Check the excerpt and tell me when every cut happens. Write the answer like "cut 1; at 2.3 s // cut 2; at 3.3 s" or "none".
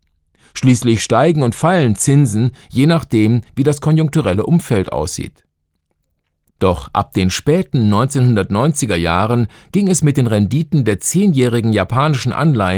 none